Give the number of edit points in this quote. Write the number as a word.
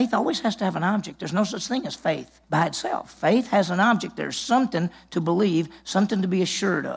one